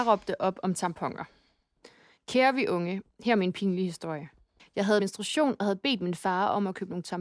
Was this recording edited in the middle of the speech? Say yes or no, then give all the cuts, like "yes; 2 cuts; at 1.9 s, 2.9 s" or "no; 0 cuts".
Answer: yes; 1 cut; at 5.0 s